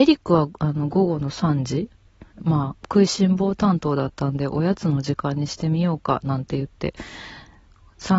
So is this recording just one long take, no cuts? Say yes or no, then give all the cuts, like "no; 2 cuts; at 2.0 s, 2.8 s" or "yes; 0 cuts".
no; 1 cut; at 2.3 s